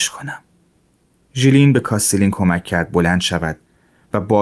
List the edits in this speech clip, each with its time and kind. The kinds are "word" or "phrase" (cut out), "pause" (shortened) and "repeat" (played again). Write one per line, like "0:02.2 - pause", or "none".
none